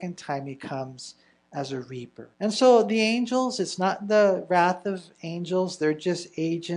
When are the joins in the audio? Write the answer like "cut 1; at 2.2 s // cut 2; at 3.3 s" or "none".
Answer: cut 1; at 2.3 s